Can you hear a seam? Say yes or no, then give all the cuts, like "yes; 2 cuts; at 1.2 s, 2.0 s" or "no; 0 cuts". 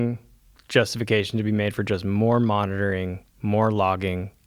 no; 0 cuts